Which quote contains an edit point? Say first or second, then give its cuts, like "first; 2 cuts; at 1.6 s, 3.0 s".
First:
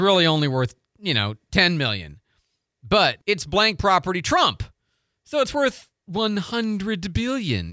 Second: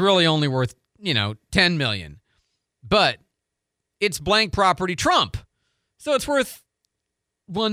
first; 2 cuts; at 3.2 s, 6.0 s